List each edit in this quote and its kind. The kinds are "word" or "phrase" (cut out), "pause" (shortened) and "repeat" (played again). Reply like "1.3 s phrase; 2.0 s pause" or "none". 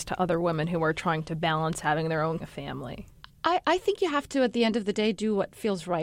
2.4 s phrase